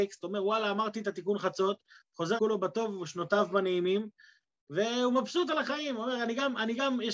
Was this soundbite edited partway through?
yes; 1 cut; at 2.4 s

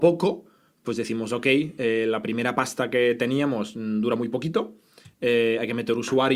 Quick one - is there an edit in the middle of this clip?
no; 0 cuts

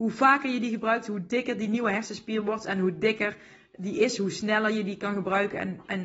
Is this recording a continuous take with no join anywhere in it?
yes; 0 cuts

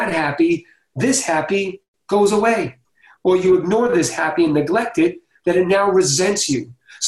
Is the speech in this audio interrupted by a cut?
no; 0 cuts

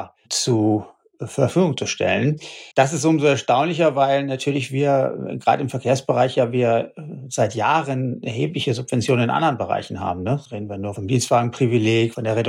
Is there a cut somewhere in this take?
yes; 1 cut; at 2.7 s

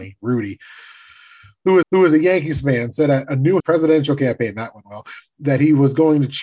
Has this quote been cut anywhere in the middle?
yes; 2 cuts; at 1.8 s, 3.6 s

